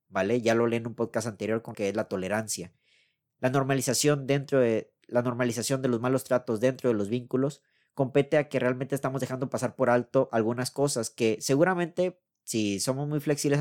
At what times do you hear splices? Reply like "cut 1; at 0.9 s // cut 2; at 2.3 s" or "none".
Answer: cut 1; at 1.7 s